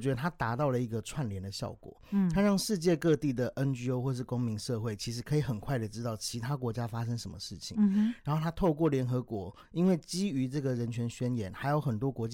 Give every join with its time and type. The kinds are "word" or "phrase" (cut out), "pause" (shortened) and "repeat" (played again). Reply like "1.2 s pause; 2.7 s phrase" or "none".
none